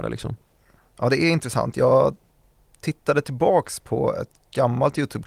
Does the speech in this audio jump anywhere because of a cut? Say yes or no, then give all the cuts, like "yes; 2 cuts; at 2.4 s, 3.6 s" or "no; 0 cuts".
no; 0 cuts